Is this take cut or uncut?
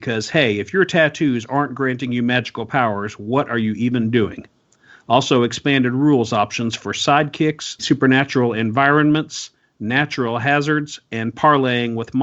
uncut